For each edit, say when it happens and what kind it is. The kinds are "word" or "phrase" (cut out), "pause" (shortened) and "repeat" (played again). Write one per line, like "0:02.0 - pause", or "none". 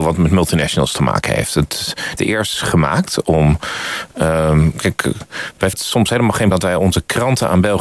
0:02.2 - phrase
0:02.5 - word
0:05.7 - word
0:06.5 - word